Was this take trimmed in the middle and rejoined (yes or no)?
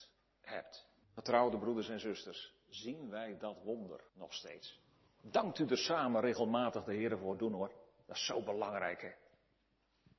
yes